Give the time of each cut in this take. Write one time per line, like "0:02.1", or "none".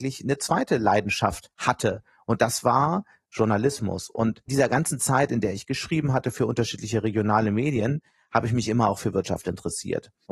0:04.5